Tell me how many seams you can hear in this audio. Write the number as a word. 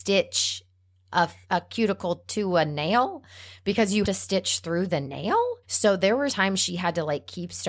four